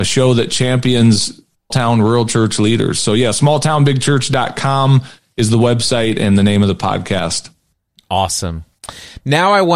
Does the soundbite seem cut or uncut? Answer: cut